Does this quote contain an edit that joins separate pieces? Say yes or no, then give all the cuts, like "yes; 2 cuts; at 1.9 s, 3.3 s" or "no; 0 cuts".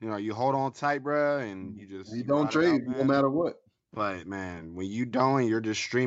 no; 0 cuts